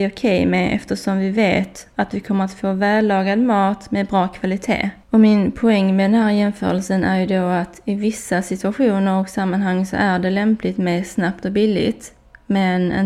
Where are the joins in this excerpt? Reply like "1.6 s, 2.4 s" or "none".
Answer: 5.0 s